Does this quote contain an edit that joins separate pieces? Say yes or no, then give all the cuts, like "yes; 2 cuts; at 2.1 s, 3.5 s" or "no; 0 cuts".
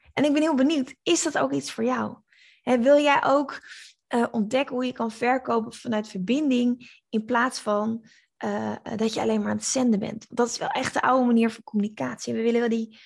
no; 0 cuts